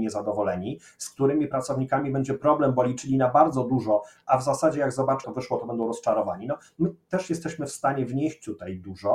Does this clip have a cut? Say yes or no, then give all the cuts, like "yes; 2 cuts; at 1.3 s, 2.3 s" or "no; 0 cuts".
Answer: yes; 1 cut; at 5.2 s